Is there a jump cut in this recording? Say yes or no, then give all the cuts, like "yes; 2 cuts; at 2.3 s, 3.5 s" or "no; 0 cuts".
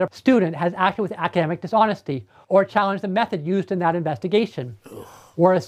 no; 0 cuts